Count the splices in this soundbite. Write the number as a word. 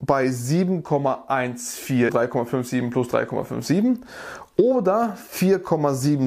one